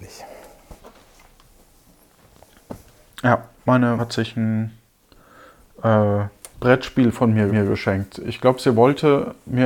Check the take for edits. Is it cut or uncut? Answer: cut